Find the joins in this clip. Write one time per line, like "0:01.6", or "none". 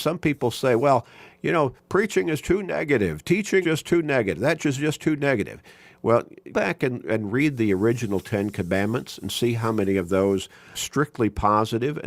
0:02.4
0:03.6
0:04.6
0:06.5
0:10.7